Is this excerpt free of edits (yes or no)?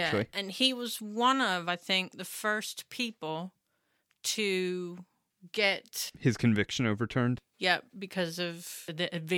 yes